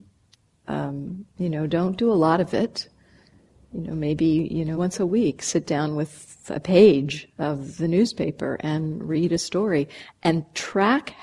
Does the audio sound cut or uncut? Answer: cut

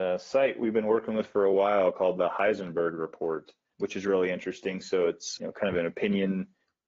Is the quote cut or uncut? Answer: cut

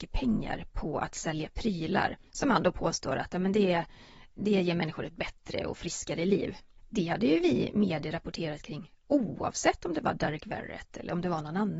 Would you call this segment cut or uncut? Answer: cut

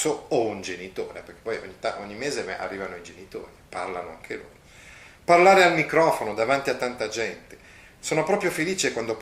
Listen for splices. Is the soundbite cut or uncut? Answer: uncut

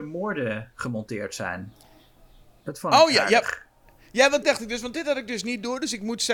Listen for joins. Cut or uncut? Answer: cut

